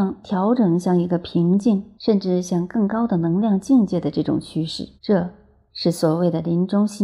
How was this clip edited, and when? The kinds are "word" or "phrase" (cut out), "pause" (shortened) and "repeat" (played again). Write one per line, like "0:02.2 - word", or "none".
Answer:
0:02.0 - pause
0:05.0 - pause